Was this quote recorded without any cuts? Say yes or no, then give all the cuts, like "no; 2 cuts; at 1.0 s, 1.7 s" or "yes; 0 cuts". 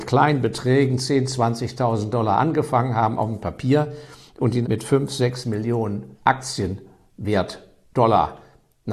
no; 2 cuts; at 4.6 s, 6.1 s